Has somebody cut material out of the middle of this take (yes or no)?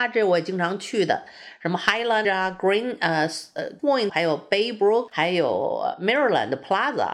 yes